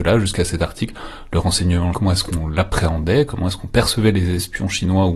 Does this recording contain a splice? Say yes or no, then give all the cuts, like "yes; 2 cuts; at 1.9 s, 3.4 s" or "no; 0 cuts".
yes; 1 cut; at 1.9 s